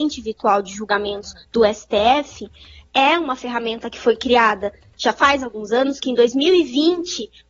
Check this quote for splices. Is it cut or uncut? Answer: cut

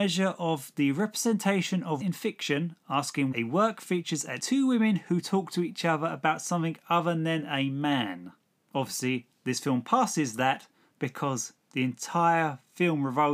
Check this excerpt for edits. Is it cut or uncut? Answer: cut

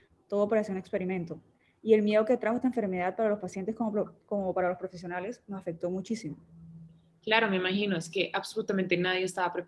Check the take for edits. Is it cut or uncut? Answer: uncut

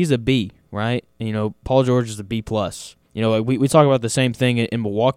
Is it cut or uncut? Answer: cut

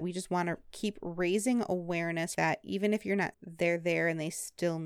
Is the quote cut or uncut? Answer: cut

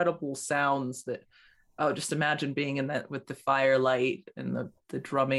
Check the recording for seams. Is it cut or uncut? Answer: uncut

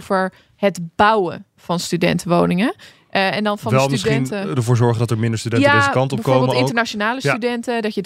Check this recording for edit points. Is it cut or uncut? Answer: uncut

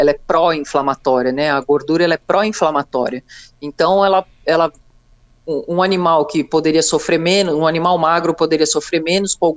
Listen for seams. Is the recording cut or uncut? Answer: uncut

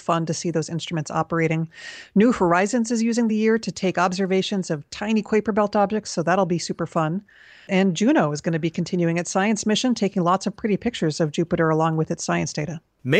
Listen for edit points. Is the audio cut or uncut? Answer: uncut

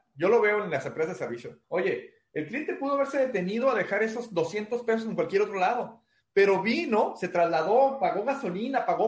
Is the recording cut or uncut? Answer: cut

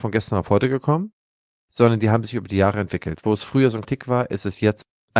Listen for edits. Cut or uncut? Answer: cut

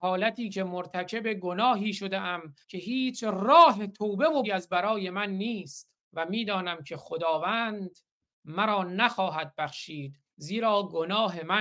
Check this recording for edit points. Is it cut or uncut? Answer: cut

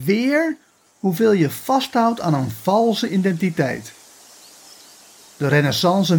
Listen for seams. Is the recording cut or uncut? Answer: uncut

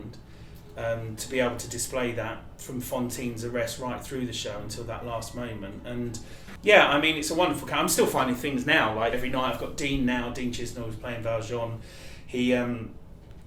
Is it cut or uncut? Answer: cut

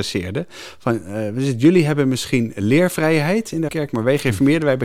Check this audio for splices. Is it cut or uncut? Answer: cut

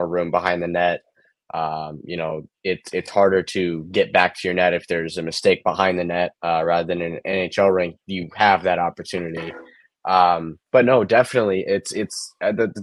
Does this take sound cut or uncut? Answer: cut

